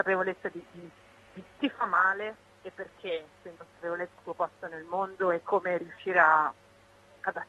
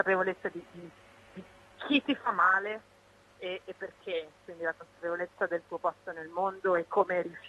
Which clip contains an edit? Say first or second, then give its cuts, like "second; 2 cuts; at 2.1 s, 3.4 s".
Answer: first; 4 cuts; at 1.6 s, 2.6 s, 3.5 s, 4.2 s